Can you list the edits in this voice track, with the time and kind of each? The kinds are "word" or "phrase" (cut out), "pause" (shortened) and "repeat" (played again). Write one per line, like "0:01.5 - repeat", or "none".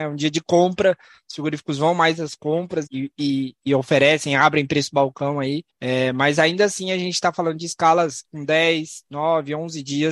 0:02.9 - word
0:05.7 - pause